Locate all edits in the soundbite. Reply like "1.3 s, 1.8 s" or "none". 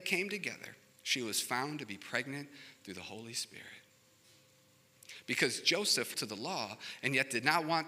6.1 s

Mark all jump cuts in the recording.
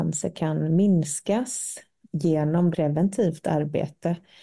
2.0 s, 2.7 s

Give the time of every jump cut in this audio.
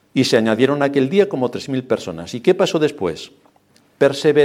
none

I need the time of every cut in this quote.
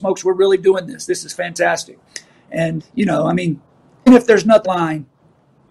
2.8 s, 4.1 s, 4.6 s

